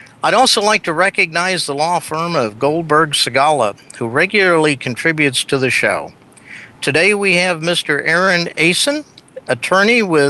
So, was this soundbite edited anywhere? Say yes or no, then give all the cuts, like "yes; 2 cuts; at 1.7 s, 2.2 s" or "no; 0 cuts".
no; 0 cuts